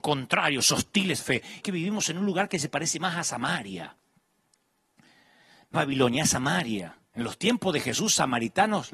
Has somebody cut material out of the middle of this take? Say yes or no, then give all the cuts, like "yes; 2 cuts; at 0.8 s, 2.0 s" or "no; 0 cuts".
yes; 4 cuts; at 1.2 s, 1.6 s, 5.7 s, 7.0 s